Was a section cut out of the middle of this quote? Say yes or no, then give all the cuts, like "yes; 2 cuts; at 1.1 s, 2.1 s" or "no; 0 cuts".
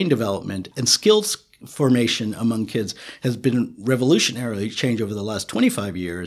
no; 0 cuts